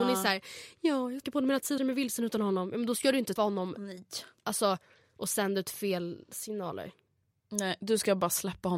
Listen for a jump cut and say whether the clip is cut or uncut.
cut